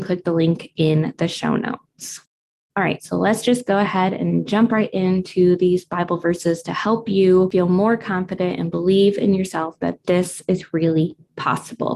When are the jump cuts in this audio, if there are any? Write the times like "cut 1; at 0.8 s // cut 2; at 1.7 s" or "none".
cut 1; at 2.4 s